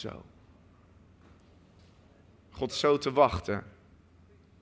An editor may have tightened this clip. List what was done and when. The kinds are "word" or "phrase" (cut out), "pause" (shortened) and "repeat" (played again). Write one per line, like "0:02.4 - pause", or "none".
0:02.7 - word